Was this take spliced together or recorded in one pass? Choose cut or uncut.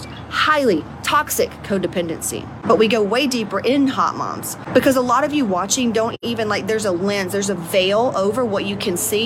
uncut